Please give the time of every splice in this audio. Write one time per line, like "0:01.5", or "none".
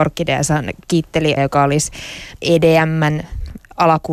0:01.4
0:02.4